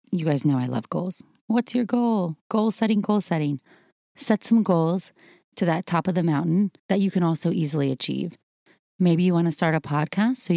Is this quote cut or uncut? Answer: cut